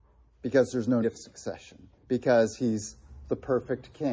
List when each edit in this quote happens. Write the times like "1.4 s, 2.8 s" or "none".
1.0 s, 2.0 s